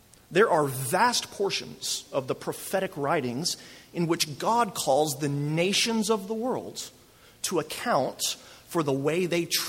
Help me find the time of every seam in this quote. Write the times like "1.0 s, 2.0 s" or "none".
none